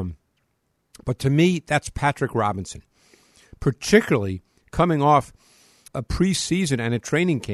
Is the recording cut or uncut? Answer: cut